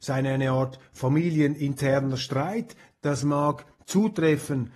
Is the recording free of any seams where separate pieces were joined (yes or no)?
yes